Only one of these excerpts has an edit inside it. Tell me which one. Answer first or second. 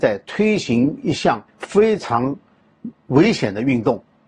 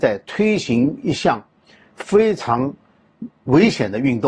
first